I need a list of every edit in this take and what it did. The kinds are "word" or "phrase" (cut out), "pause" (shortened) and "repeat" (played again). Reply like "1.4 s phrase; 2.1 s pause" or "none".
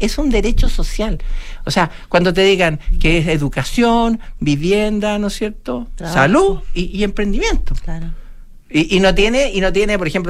none